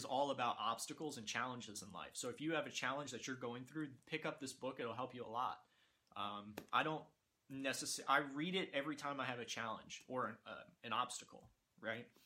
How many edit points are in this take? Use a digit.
0